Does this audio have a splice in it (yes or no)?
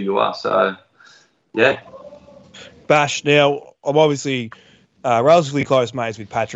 no